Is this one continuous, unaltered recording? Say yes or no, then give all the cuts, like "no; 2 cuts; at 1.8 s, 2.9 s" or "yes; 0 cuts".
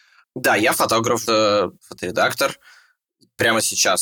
no; 2 cuts; at 1.2 s, 1.8 s